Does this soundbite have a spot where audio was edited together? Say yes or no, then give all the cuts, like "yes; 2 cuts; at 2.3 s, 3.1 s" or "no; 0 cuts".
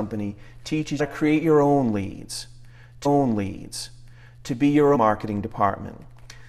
yes; 3 cuts; at 1.0 s, 3.0 s, 4.9 s